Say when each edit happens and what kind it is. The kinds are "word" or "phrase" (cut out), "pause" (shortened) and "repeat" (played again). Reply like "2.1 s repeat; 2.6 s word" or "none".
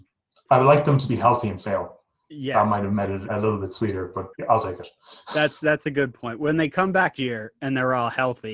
3.3 s word; 4.3 s pause; 7.2 s word